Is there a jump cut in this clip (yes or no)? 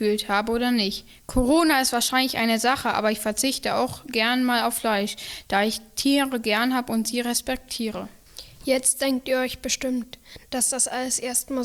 no